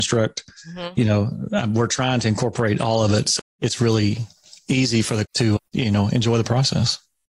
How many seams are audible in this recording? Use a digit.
3